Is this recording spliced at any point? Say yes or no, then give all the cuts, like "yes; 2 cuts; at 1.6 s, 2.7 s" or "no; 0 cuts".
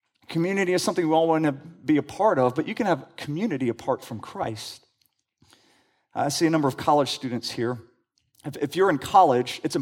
no; 0 cuts